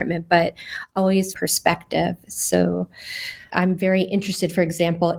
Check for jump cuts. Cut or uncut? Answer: cut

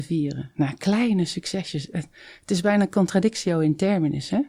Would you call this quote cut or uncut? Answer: uncut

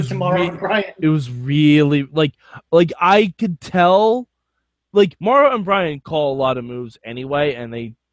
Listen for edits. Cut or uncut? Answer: uncut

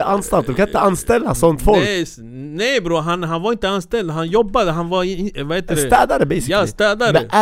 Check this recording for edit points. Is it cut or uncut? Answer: uncut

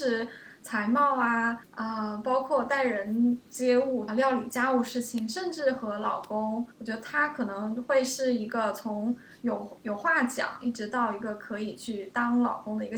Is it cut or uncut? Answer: cut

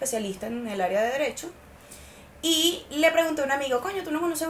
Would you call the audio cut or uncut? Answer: uncut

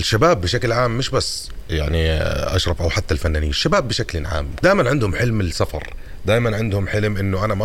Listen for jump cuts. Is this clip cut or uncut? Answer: cut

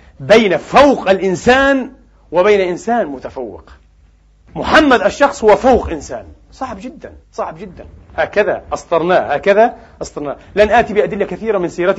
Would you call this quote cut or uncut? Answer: cut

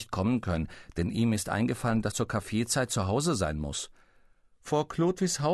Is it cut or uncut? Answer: cut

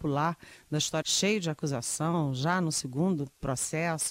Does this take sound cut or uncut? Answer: cut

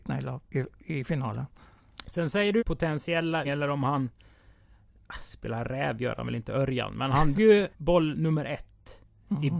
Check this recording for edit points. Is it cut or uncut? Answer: cut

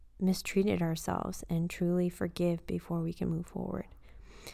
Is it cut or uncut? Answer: uncut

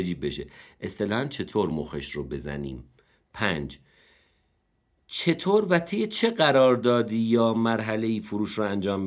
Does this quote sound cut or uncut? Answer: uncut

